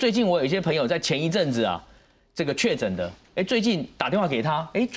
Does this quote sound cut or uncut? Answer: uncut